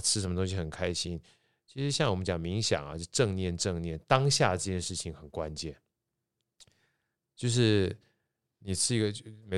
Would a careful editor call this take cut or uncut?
uncut